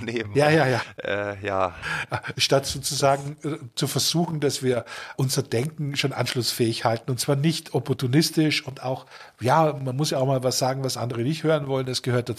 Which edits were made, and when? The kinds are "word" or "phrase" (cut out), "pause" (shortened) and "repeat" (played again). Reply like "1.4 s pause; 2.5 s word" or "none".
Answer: 5.1 s word